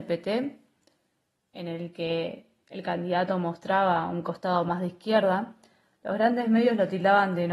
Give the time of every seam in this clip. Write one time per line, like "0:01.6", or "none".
none